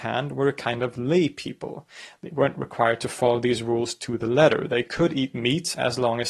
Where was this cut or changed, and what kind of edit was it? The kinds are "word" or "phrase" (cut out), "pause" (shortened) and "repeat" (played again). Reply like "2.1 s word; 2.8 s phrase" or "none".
none